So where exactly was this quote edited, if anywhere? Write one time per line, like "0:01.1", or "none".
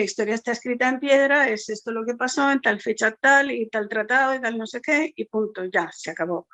none